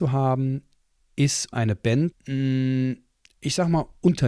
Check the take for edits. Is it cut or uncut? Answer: cut